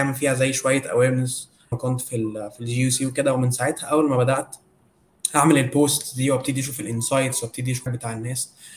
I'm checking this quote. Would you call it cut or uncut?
cut